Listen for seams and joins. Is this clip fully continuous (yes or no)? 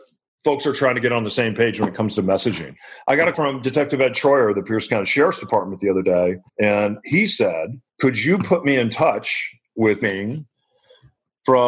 no